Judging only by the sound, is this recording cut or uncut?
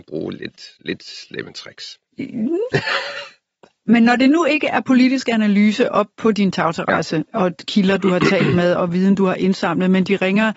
uncut